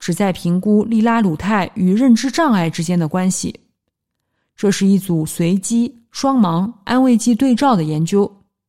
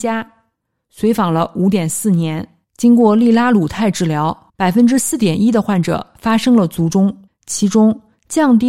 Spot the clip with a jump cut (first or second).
second